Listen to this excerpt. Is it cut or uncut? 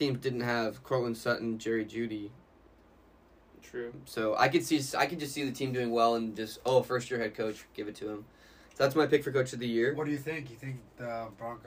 uncut